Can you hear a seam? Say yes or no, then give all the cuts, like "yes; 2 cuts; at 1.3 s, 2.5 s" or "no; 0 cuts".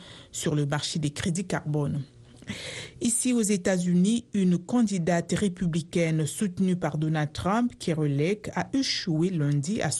no; 0 cuts